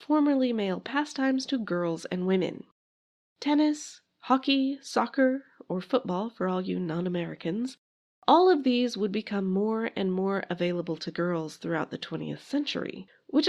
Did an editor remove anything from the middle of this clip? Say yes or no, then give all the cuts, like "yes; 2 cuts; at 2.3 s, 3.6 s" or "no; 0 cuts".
no; 0 cuts